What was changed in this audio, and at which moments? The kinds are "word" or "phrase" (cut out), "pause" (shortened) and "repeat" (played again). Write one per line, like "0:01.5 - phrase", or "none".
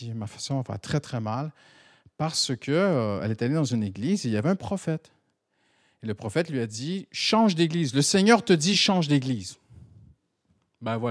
none